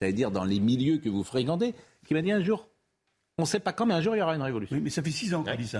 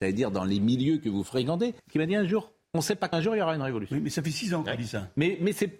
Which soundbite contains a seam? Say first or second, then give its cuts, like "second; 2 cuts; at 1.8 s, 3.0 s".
second; 3 cuts; at 1.8 s, 2.6 s, 3.1 s